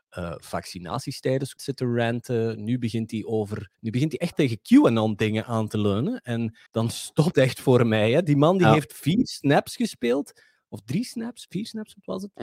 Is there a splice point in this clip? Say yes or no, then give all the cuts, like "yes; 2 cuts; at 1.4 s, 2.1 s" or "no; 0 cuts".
yes; 5 cuts; at 1.6 s, 3.7 s, 4.3 s, 6.7 s, 7.3 s